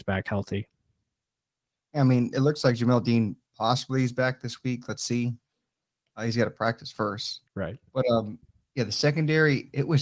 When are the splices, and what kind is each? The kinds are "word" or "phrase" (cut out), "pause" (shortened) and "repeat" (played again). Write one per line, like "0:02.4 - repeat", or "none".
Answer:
0:07.5 - pause